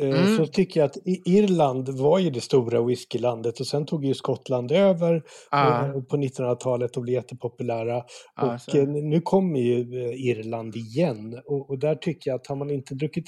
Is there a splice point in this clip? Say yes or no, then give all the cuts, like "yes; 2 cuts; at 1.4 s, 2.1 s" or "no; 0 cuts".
no; 0 cuts